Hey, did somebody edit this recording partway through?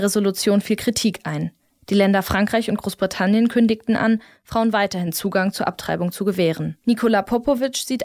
no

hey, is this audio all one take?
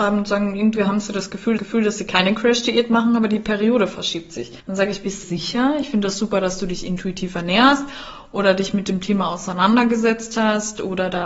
no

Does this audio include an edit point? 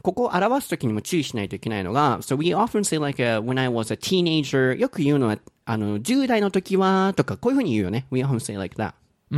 no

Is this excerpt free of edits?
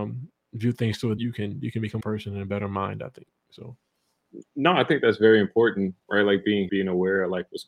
no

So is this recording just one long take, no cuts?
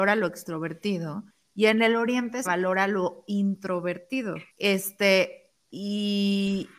no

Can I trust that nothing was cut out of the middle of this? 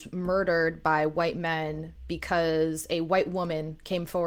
yes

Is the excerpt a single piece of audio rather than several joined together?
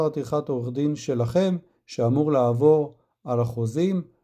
yes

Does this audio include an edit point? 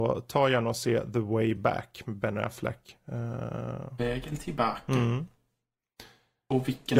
no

